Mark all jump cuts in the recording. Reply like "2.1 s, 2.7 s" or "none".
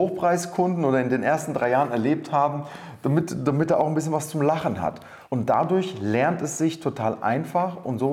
5.2 s